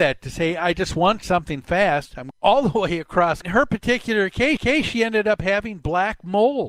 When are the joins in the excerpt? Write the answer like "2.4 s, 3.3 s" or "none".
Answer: 2.3 s, 3.4 s, 4.6 s

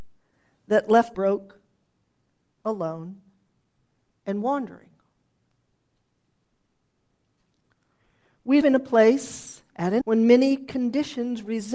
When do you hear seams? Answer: 1.1 s, 8.6 s, 10.0 s

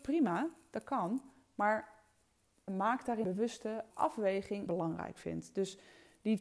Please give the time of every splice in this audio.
2.7 s, 3.2 s, 3.9 s, 4.7 s

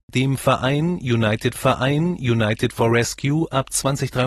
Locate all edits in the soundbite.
1.6 s

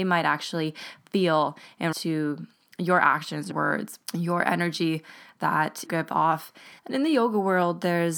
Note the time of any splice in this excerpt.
1.9 s, 3.5 s, 4.0 s, 5.8 s, 6.8 s

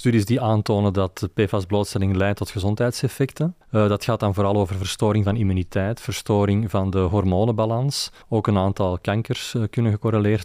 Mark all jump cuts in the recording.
3.6 s, 8.2 s

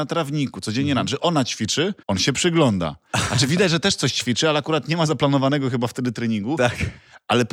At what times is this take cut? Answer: 2.0 s

